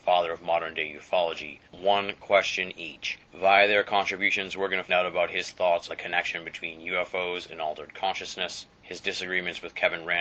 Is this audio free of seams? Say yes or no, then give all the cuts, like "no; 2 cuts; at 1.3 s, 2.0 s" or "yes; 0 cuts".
no; 5 cuts; at 1.7 s, 3.2 s, 4.9 s, 5.9 s, 8.7 s